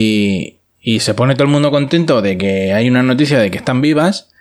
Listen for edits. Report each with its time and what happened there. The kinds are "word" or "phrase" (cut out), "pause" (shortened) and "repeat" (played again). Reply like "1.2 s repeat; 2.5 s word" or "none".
none